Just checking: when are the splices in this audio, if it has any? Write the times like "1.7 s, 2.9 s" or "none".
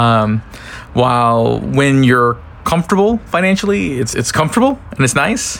4.1 s